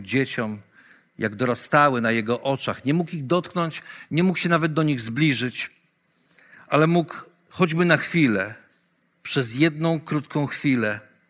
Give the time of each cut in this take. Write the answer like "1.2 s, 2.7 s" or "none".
none